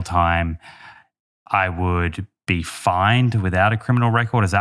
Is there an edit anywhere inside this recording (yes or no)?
no